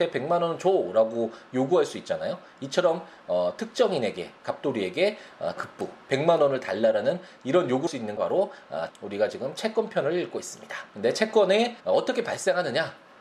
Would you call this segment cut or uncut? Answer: cut